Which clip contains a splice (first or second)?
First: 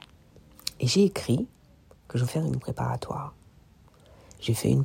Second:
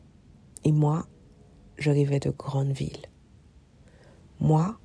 first